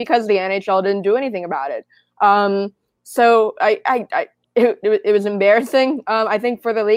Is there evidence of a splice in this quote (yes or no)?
no